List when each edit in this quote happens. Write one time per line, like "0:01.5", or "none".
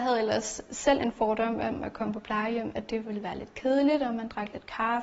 none

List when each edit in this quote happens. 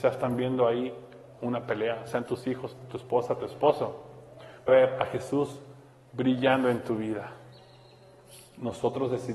0:01.4
0:04.7

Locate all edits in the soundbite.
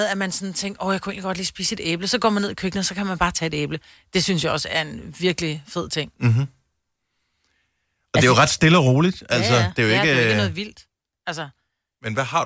none

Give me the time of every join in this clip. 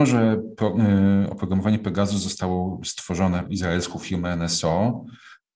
0:03.4

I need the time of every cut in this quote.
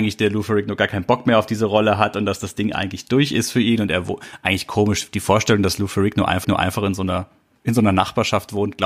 0:06.4

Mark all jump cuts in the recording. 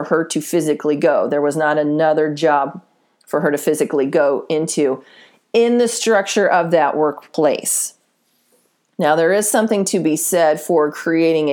none

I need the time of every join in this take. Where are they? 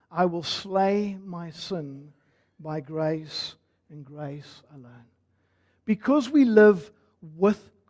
none

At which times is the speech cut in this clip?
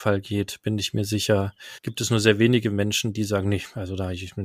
0:01.8

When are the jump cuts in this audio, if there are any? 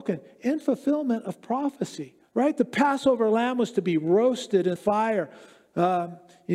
0:02.3
0:04.8

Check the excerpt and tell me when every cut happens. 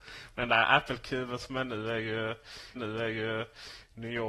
0:02.8

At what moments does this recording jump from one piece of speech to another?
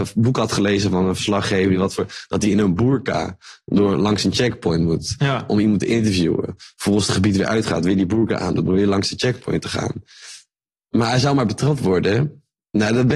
none

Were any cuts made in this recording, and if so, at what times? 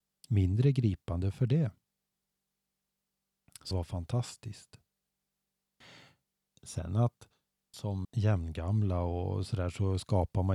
0:03.7
0:07.7
0:08.0

